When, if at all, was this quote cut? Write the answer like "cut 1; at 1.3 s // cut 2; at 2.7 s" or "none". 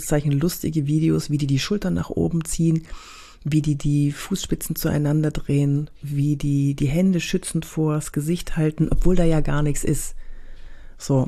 none